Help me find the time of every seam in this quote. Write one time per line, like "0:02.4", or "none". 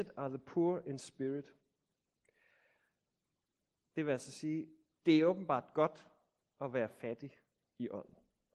none